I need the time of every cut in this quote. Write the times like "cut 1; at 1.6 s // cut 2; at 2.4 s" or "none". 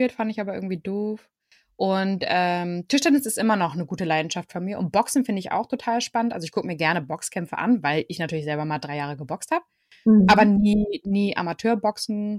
none